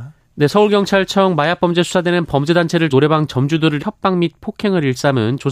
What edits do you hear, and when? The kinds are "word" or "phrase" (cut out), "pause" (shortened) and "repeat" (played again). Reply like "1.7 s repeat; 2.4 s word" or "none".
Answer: 2.9 s word; 3.8 s word